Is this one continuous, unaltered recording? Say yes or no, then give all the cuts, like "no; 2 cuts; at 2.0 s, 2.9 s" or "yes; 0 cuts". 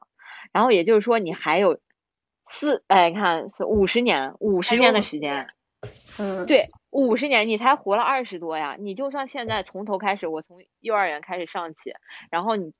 yes; 0 cuts